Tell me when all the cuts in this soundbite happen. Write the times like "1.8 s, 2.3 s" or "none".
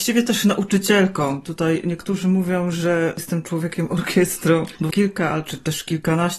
4.9 s